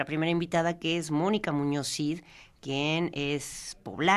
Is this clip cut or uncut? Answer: uncut